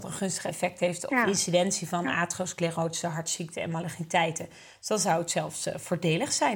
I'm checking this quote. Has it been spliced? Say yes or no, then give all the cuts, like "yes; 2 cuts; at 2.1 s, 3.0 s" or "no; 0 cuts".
yes; 1 cut; at 1.1 s